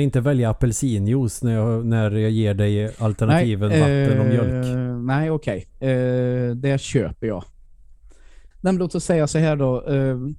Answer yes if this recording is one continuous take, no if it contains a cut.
no